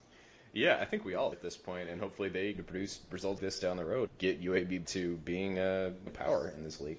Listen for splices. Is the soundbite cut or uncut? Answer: cut